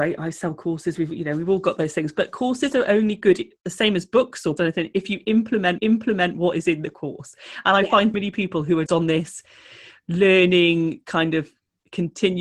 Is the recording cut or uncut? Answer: cut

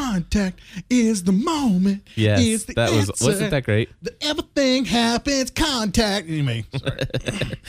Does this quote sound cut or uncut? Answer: uncut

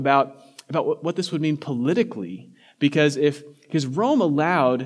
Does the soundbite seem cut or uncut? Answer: uncut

